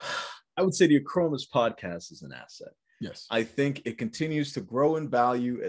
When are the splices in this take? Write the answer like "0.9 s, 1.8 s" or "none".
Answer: none